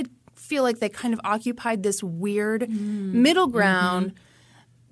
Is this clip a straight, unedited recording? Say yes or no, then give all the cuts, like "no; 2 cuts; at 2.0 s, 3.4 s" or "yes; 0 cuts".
yes; 0 cuts